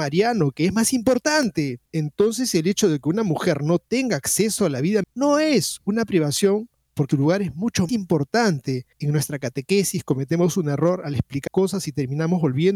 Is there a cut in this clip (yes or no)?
yes